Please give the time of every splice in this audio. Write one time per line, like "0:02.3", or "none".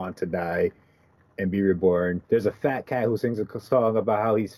0:02.2